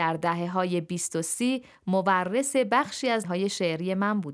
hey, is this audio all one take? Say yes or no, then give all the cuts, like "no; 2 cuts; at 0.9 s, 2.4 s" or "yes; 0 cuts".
no; 1 cut; at 3.2 s